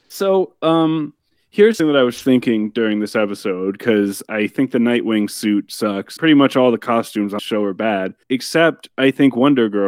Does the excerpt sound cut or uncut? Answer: cut